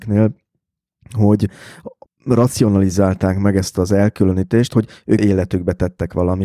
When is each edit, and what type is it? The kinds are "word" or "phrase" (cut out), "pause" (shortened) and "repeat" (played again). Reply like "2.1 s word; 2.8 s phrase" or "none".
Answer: 2.1 s word; 5.2 s phrase